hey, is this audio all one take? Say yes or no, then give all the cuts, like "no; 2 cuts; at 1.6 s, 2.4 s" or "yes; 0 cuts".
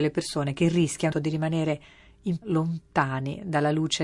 no; 2 cuts; at 1.1 s, 2.4 s